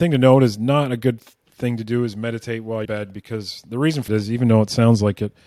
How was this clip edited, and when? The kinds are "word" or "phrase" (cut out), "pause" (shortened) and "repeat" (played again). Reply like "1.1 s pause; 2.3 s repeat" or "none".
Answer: 2.8 s phrase; 4.1 s word